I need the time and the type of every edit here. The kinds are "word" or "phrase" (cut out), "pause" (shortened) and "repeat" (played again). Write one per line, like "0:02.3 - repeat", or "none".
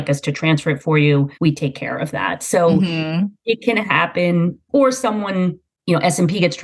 0:01.3 - pause